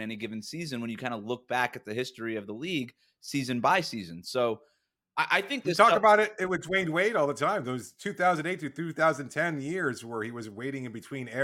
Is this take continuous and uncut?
yes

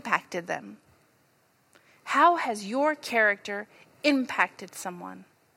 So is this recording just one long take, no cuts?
yes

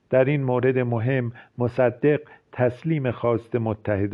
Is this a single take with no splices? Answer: yes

